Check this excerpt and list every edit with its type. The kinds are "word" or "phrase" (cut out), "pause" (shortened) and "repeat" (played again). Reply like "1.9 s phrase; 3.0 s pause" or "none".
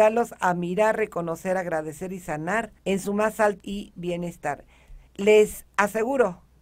2.8 s pause; 3.6 s word; 5.1 s pause